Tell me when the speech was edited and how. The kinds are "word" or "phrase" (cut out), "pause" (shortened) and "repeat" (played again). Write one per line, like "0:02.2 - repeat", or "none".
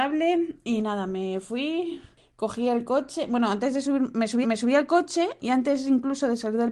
0:04.4 - repeat